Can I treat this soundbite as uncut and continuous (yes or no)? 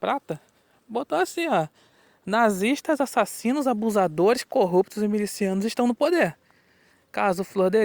yes